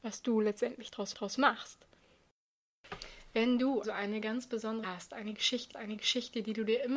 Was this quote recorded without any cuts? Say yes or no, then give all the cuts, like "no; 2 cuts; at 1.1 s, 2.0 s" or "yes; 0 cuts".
no; 4 cuts; at 1.1 s, 3.8 s, 4.8 s, 5.7 s